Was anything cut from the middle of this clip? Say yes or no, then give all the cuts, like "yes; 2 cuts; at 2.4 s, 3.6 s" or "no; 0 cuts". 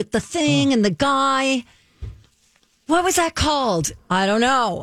no; 0 cuts